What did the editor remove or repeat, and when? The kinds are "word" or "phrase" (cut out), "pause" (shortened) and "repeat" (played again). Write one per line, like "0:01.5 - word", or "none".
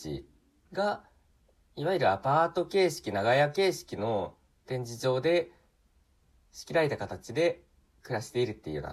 none